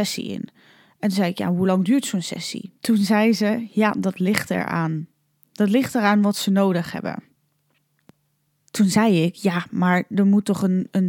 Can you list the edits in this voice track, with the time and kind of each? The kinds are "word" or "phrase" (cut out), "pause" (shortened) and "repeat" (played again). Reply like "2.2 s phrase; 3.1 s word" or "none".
2.8 s pause; 5.3 s pause

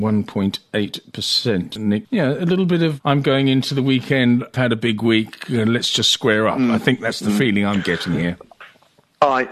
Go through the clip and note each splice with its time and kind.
2.0 s word; 4.5 s word

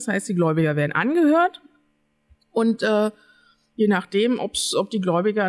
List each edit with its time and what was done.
none

